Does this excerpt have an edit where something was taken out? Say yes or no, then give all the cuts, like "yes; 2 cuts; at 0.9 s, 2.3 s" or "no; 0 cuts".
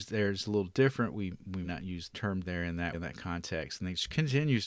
yes; 4 cuts; at 1.6 s, 2.1 s, 2.4 s, 2.9 s